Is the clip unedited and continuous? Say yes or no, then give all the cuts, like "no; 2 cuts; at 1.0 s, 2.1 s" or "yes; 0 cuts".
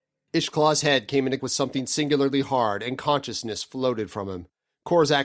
no; 1 cut; at 1.4 s